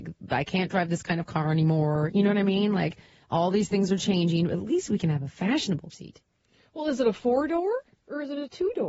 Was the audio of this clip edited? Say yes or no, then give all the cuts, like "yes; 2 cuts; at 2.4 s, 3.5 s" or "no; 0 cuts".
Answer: yes; 1 cut; at 5.9 s